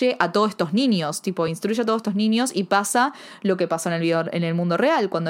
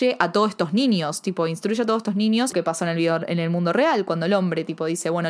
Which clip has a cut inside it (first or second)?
second